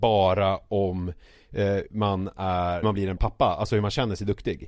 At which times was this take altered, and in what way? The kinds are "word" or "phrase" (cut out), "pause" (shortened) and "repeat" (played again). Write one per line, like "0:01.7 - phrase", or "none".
0:01.9 - word
0:02.8 - word
0:03.2 - word